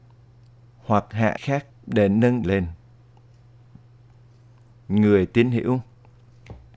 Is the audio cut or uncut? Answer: cut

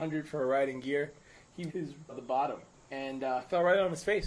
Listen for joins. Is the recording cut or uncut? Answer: cut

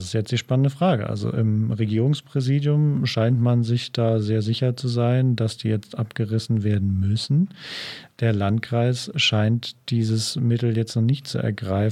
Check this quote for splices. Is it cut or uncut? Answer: uncut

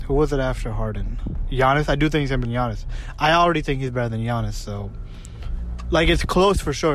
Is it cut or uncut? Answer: cut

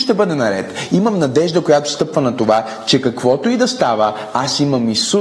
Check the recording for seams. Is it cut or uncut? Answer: uncut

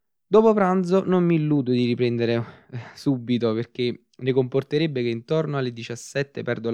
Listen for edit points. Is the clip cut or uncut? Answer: uncut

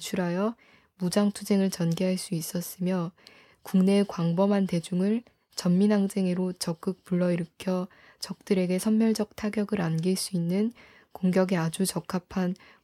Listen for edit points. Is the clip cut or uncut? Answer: uncut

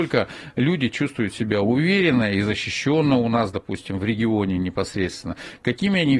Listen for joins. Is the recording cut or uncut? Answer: uncut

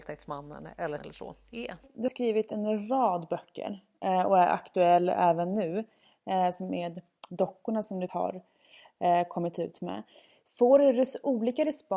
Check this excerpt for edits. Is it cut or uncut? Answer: cut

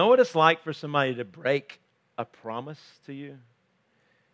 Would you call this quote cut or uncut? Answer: uncut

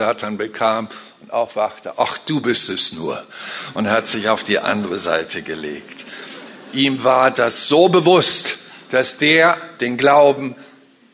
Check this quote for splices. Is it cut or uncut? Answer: uncut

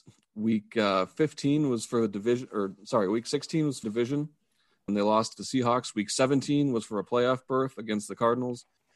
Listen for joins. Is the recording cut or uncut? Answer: cut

